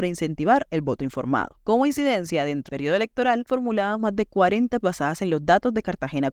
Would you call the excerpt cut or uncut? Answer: cut